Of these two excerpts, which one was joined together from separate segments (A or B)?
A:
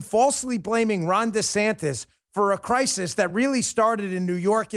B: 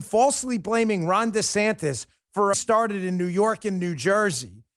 B